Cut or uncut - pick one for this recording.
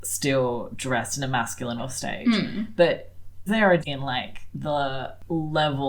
cut